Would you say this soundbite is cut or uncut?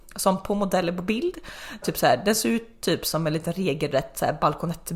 cut